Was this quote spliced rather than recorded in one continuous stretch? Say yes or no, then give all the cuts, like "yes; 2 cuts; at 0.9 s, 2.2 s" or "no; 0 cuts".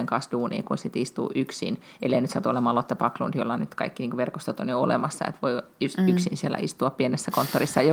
no; 0 cuts